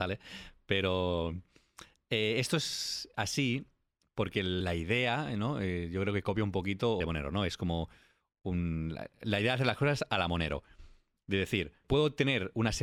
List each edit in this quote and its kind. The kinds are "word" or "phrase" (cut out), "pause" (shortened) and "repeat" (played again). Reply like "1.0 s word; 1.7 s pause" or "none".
none

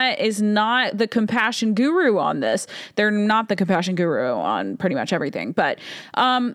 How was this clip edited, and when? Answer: none

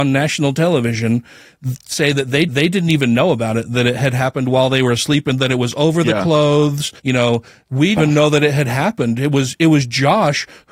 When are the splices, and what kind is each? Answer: 1.9 s word; 2.5 s repeat; 7.0 s pause; 8.0 s phrase

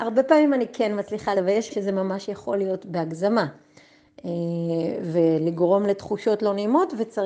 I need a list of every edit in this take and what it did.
1.3 s word; 1.7 s word

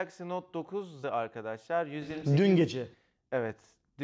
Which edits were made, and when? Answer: 1.0 s word

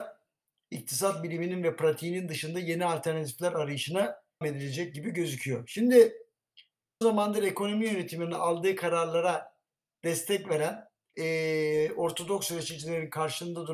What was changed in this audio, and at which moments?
4.4 s word; 7.0 s word; 11.1 s word

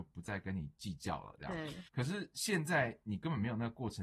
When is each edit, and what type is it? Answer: 1.9 s pause

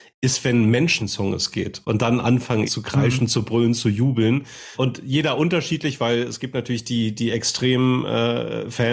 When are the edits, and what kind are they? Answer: 1.0 s phrase; 2.7 s word

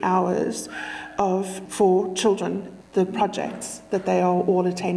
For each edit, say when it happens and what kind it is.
1.7 s word; 2.8 s word

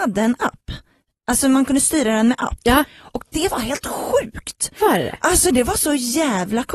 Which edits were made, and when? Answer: none

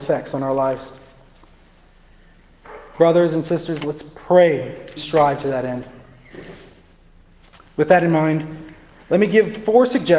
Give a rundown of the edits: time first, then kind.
5.0 s word

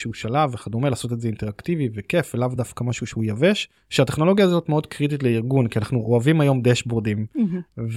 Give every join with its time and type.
none

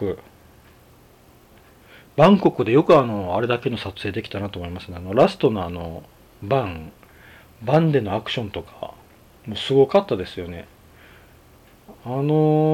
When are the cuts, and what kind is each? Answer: none

